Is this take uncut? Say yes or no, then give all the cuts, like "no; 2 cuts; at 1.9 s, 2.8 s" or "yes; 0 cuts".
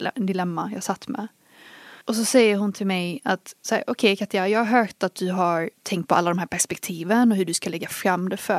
no; 3 cuts; at 2.0 s, 3.6 s, 5.7 s